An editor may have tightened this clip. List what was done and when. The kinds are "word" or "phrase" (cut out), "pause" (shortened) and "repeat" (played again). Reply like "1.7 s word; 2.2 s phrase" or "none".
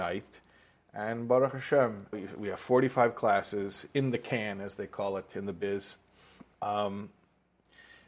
2.1 s word; 6.5 s pause